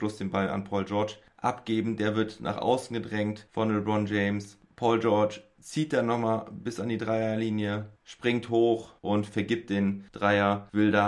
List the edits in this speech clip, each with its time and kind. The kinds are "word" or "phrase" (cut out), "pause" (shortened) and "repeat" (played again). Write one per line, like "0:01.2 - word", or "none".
0:08.0 - pause
0:09.0 - pause